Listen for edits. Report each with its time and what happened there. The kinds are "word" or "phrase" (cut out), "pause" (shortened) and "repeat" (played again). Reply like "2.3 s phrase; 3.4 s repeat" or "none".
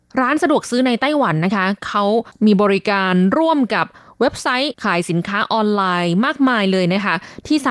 none